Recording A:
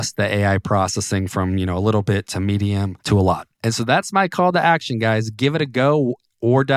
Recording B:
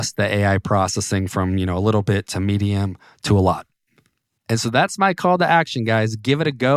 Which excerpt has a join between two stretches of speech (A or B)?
A